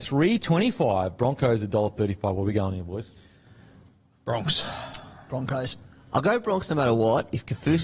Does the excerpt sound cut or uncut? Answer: uncut